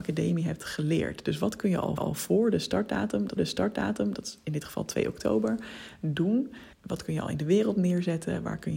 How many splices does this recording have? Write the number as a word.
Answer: three